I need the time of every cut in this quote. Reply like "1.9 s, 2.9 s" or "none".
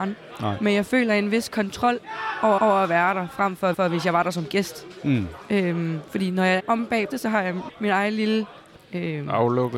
2.6 s, 3.7 s, 6.6 s, 7.1 s, 7.7 s, 8.8 s